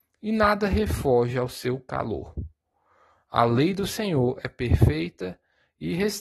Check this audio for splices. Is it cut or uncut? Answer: uncut